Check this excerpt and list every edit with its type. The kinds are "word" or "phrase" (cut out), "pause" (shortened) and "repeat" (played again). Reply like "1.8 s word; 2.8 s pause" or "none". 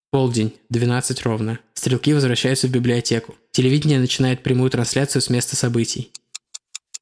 none

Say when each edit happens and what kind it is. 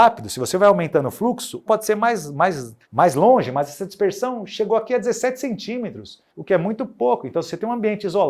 1.7 s phrase; 2.8 s pause; 6.3 s pause

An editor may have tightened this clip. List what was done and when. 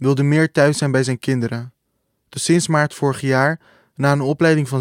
none

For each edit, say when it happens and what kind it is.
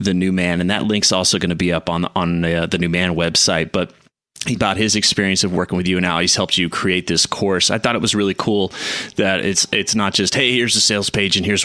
4.6 s word

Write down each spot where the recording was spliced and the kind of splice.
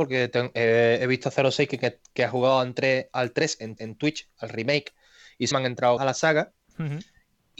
3.8 s repeat; 5.5 s phrase; 6.0 s phrase

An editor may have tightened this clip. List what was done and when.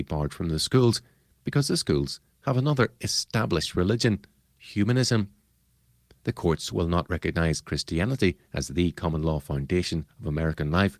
none

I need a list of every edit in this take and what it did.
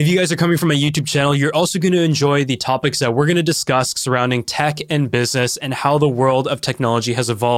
none

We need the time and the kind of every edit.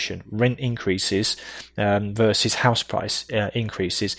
none

